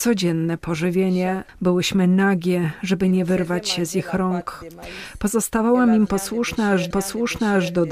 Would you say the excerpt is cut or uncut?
cut